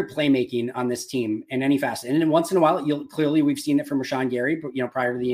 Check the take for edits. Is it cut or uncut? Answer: uncut